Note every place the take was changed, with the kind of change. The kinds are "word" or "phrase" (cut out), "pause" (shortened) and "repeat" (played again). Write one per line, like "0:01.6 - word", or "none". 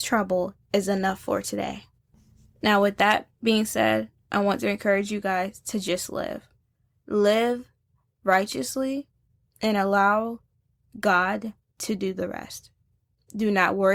none